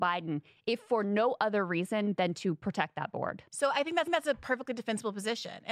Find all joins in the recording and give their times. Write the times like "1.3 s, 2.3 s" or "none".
3.5 s, 4.1 s